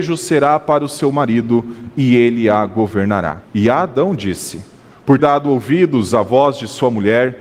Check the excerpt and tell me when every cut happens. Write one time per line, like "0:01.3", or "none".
0:03.4
0:05.2